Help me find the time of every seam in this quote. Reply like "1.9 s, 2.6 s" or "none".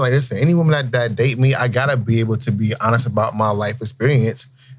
none